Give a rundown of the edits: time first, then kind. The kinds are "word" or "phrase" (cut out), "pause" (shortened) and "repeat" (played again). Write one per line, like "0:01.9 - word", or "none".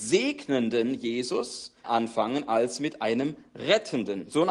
0:01.8 - word